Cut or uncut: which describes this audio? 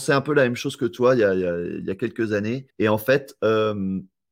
cut